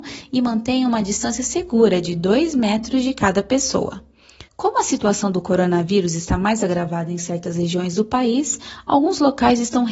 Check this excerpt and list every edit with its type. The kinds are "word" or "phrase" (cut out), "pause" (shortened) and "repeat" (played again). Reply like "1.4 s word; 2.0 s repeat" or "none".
4.5 s pause